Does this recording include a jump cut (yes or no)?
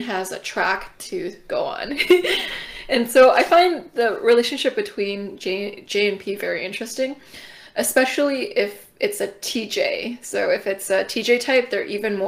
no